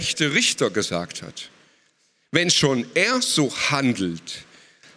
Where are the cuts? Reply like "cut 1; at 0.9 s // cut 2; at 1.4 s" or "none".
none